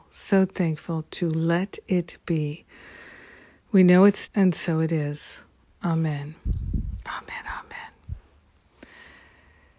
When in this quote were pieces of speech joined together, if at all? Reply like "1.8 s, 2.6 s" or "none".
4.3 s